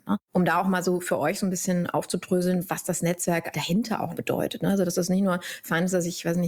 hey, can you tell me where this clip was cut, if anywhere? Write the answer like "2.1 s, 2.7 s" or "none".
3.5 s, 4.1 s